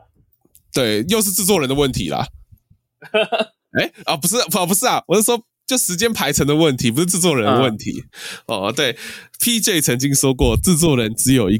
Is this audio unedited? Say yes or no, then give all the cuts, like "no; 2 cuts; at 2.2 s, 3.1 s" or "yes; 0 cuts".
yes; 0 cuts